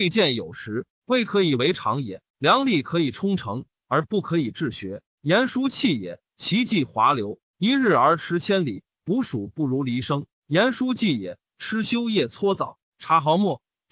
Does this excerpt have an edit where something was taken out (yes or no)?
yes